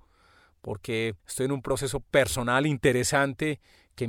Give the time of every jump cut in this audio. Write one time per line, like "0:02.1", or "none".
0:01.2